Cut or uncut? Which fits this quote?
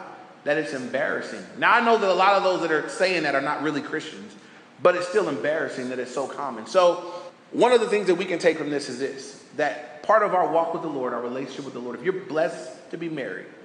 uncut